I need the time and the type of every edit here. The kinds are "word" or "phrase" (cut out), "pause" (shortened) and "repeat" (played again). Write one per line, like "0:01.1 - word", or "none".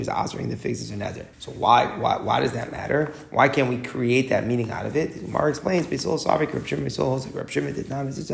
0:01.3 - pause